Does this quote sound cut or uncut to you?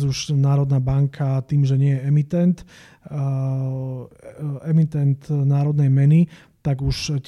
uncut